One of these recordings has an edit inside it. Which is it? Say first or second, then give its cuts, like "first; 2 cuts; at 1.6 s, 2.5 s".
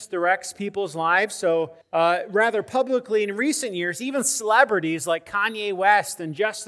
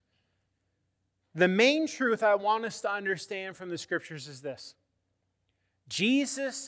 first; 1 cut; at 1.8 s